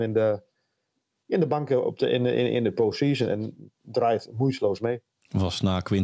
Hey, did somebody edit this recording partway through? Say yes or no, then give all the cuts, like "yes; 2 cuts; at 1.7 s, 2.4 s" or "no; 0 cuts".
no; 0 cuts